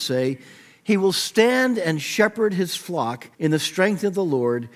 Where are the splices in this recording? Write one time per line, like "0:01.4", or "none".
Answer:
0:03.3

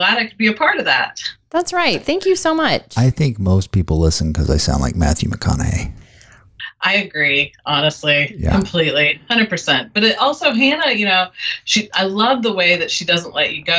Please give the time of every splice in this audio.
none

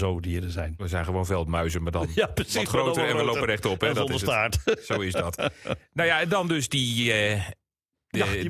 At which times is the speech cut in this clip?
none

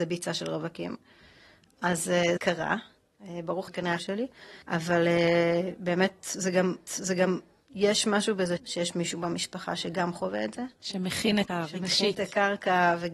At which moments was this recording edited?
0:02.4
0:03.7
0:04.0
0:04.6
0:06.9
0:08.6
0:10.7
0:11.5

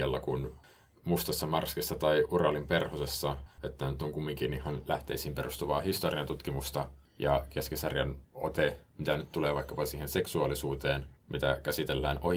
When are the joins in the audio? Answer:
0:03.5
0:08.2
0:11.2

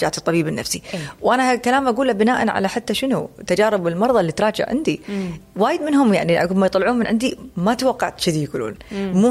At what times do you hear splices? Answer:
none

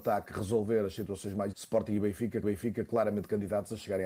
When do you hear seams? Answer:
0:01.5
0:02.4

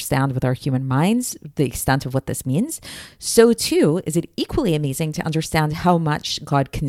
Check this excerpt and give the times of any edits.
none

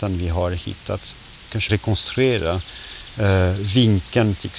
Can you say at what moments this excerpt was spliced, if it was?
0:01.7

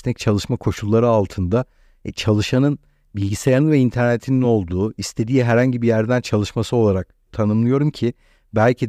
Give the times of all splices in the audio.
none

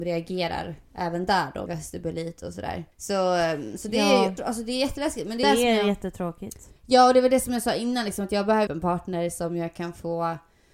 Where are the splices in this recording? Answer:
0:01.7
0:02.9
0:04.4
0:05.4
0:06.8
0:08.7

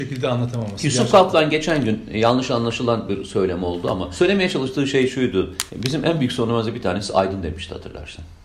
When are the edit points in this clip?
0:05.7

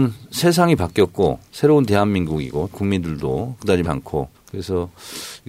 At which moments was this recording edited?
0:01.5
0:02.7
0:03.8
0:04.3

